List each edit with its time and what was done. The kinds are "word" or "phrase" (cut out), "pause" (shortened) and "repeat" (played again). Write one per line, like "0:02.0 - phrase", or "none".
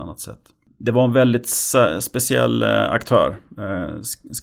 none